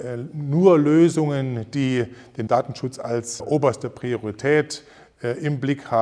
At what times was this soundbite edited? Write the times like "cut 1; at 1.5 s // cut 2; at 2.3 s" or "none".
cut 1; at 2.5 s // cut 2; at 3.4 s